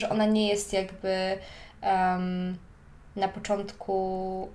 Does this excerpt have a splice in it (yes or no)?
no